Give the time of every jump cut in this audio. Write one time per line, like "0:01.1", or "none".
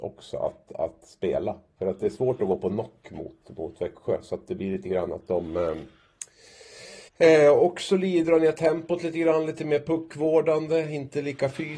0:07.1